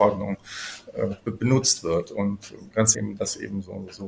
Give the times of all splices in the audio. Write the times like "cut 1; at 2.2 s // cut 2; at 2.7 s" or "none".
cut 1; at 2.9 s